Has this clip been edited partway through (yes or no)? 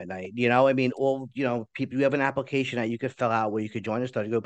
no